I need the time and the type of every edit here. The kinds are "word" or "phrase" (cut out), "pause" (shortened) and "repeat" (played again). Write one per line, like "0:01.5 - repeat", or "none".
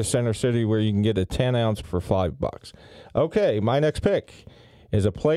0:01.8 - word